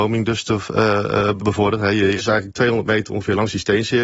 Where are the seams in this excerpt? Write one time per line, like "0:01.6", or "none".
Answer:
0:01.4
0:02.2